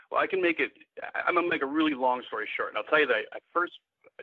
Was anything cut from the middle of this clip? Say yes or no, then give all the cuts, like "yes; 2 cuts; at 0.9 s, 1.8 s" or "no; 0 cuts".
no; 0 cuts